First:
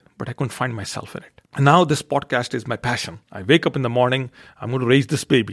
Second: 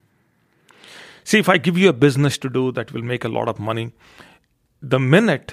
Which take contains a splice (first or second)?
first